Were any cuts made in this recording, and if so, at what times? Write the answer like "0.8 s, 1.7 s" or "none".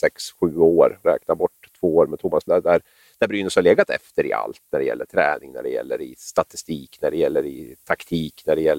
1.0 s, 2.5 s